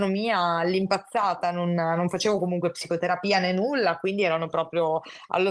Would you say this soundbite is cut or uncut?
uncut